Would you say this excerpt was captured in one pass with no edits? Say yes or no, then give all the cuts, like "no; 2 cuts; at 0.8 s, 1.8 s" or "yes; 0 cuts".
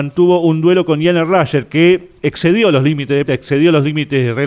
no; 1 cut; at 3.3 s